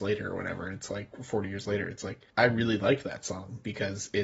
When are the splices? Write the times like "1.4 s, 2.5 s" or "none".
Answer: 2.3 s